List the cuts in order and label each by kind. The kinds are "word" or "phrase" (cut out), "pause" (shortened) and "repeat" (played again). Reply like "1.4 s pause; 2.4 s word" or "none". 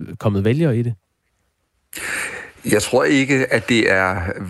2.6 s pause

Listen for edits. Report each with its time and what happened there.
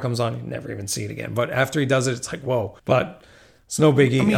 2.8 s pause

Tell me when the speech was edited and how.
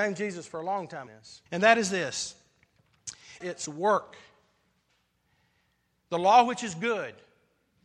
1.1 s word; 1.5 s pause; 3.4 s phrase

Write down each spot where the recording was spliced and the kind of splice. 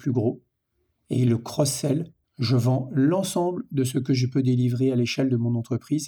2.2 s pause

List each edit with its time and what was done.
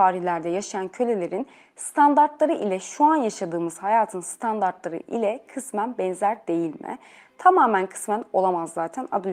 none

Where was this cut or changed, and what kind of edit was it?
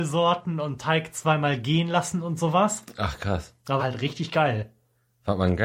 3.8 s phrase

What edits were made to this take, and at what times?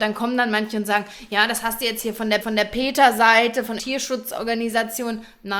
2.4 s repeat; 3.8 s word

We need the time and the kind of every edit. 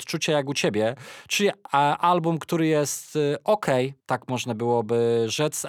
4.0 s pause

